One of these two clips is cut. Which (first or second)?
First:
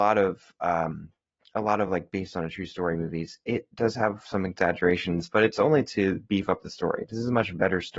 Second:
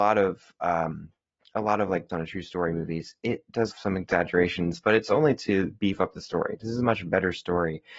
second